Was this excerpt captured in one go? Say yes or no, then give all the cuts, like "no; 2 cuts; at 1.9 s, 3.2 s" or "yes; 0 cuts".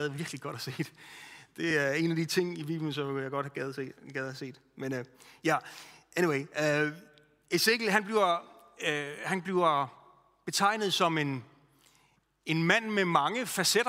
yes; 0 cuts